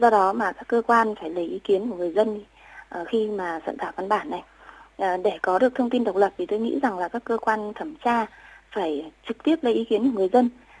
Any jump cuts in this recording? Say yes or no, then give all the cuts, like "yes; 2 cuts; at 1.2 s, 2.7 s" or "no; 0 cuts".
no; 0 cuts